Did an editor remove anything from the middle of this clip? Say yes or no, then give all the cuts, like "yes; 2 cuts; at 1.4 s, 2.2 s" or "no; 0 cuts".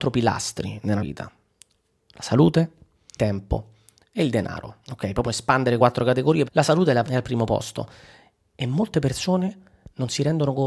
yes; 7 cuts; at 1.0 s, 3.2 s, 4.8 s, 5.2 s, 5.8 s, 6.4 s, 7.0 s